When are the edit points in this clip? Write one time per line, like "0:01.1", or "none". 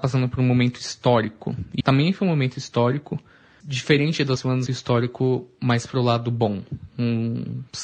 0:01.8
0:03.6
0:04.4
0:04.7